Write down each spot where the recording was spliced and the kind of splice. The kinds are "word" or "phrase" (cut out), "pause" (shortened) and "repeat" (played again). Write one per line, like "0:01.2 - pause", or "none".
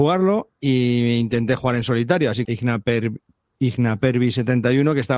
0:02.4 - phrase